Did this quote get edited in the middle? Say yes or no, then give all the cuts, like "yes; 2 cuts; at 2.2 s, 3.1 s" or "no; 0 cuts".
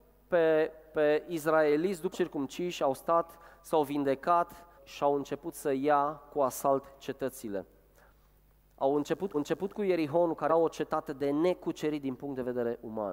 yes; 4 cuts; at 2.1 s, 4.8 s, 9.3 s, 10.5 s